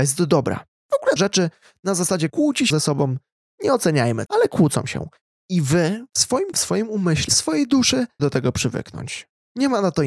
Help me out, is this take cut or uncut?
cut